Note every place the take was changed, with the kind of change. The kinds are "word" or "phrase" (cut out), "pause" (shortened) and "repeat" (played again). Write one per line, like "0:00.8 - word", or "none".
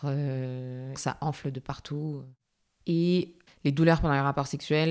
0:01.0 - phrase
0:03.5 - pause